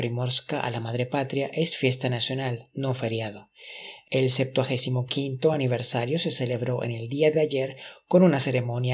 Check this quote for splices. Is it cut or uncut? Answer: uncut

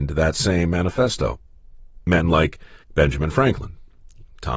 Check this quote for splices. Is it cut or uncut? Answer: cut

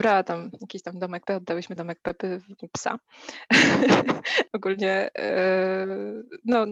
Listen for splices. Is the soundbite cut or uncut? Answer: cut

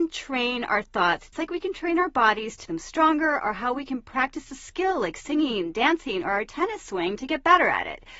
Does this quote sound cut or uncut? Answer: cut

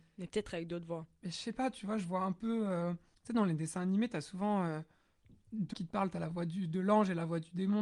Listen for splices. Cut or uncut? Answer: cut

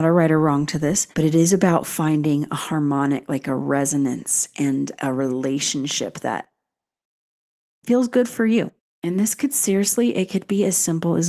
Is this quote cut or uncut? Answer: cut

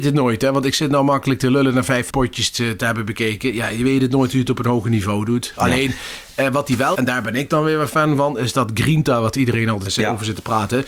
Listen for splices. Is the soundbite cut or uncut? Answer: cut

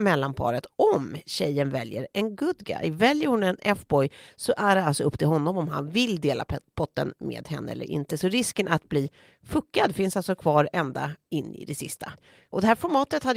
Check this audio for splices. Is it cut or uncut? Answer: uncut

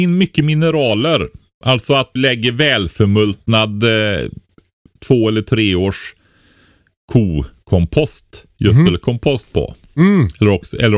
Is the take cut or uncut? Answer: cut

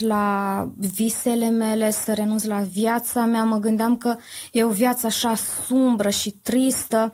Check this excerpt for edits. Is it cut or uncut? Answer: uncut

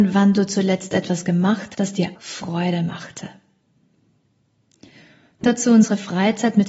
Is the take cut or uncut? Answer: cut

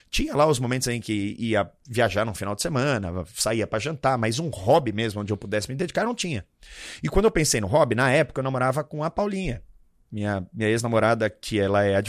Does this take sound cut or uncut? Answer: uncut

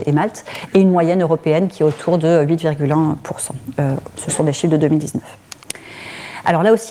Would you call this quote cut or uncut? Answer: uncut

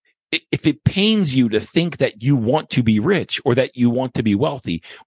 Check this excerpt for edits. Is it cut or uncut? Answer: uncut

